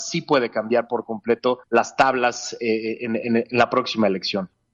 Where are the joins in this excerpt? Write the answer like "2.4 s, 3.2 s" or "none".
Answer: 1.6 s